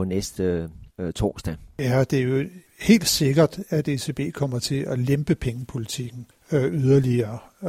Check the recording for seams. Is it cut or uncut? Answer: cut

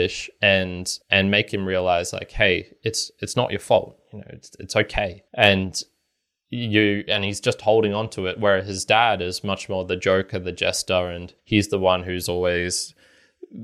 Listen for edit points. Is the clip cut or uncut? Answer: cut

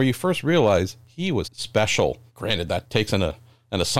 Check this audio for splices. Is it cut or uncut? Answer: cut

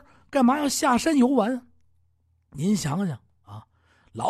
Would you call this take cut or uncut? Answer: uncut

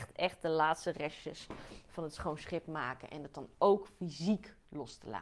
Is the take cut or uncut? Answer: uncut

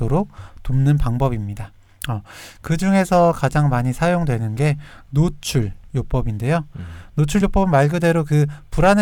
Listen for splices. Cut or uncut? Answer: uncut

